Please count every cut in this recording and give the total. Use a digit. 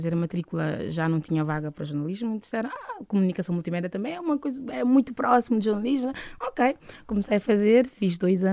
0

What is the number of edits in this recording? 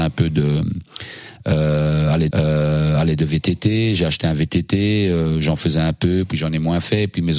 1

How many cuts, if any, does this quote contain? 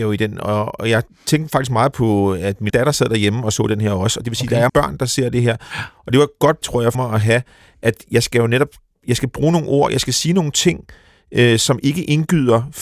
4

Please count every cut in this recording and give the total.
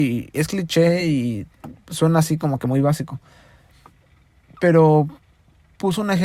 0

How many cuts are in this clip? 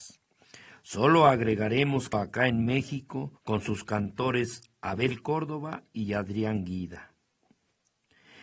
2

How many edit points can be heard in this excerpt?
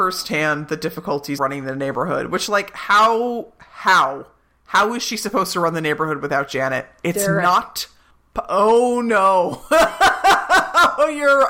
1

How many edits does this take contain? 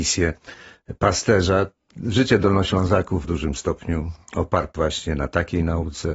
3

